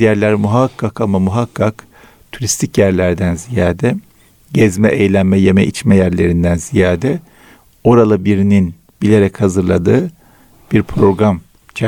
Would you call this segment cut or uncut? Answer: uncut